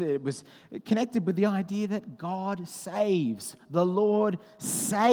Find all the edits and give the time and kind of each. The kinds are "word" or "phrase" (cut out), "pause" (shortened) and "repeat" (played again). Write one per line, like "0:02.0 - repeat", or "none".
none